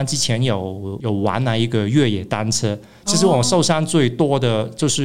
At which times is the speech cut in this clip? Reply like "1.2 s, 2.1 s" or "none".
none